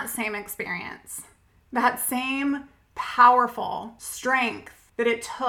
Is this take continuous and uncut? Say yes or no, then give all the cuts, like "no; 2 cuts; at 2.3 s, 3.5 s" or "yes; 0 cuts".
yes; 0 cuts